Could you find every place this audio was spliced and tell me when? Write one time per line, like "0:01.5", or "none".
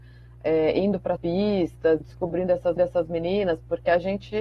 0:01.2
0:02.0
0:02.8